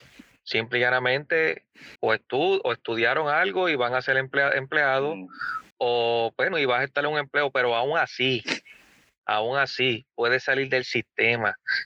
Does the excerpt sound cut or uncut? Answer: cut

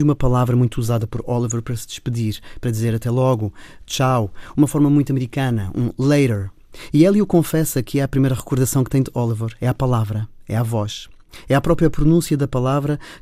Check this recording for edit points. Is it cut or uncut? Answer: uncut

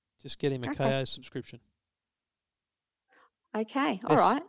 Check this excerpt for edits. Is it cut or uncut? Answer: uncut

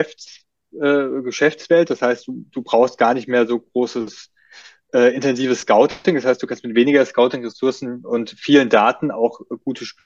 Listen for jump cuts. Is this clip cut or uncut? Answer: uncut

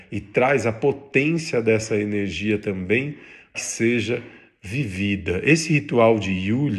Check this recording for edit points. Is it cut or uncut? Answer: cut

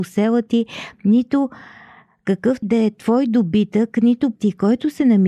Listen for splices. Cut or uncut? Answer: cut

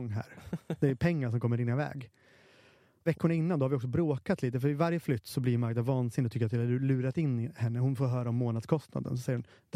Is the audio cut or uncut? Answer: uncut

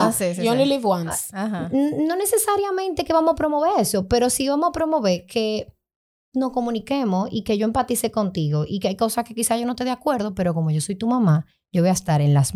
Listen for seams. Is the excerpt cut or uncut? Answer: uncut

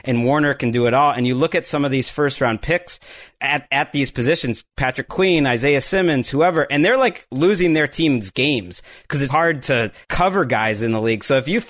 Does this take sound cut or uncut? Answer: cut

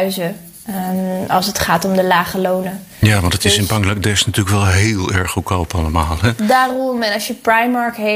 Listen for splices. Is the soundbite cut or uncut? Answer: uncut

